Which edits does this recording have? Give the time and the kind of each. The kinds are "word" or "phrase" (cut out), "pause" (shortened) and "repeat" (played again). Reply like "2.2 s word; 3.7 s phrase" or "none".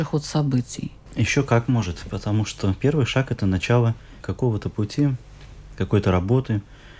none